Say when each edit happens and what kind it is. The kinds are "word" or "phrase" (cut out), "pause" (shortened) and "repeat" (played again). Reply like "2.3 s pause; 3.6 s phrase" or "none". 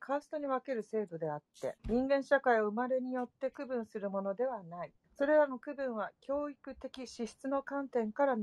1.8 s pause; 5.0 s pause